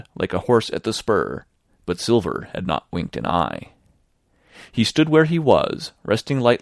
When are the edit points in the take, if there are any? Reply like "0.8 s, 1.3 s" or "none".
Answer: none